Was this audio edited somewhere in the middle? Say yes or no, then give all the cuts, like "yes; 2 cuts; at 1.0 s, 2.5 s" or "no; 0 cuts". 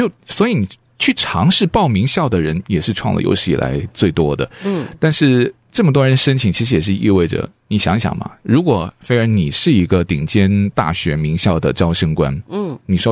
no; 0 cuts